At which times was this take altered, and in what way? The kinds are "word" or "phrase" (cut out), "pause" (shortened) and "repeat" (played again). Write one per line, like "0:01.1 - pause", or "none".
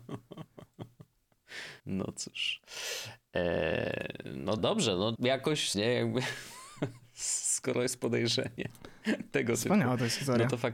0:01.8 - pause
0:04.6 - word
0:05.1 - word
0:05.7 - phrase